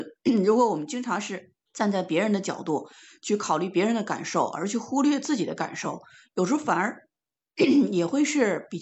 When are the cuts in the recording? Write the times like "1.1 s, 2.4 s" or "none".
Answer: 1.7 s